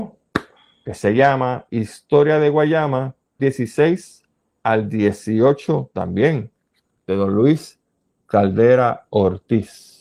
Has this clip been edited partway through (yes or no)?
yes